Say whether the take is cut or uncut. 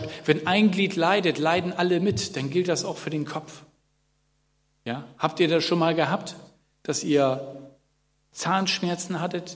uncut